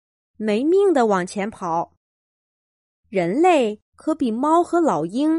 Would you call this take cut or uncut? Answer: cut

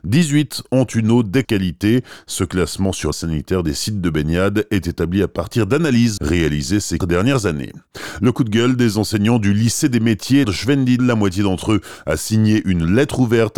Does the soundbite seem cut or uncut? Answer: cut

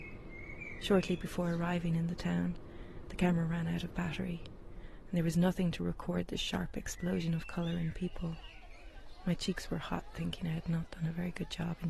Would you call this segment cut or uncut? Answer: uncut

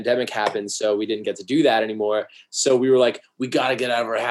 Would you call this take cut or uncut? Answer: uncut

